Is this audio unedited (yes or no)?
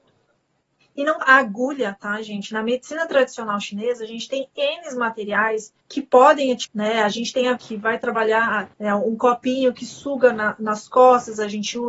no